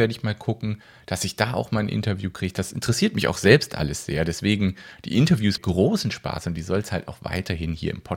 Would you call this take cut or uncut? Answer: cut